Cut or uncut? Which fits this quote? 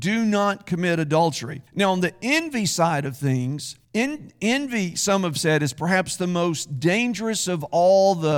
cut